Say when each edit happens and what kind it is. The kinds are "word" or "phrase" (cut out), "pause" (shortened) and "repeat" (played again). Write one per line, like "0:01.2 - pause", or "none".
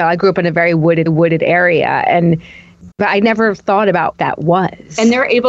0:01.1 - repeat
0:02.9 - pause
0:04.1 - word